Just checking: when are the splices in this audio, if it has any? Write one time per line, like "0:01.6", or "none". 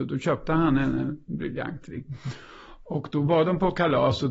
none